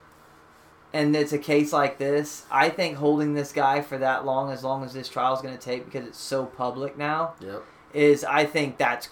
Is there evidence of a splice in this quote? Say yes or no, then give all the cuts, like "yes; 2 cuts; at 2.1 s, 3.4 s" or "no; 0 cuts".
no; 0 cuts